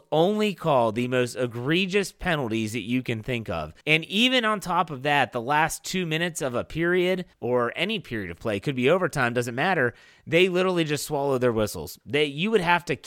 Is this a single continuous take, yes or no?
no